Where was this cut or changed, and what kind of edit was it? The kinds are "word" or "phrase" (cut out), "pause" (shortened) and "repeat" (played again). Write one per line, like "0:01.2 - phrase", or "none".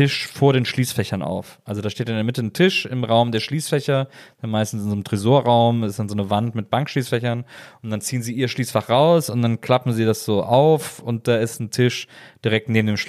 none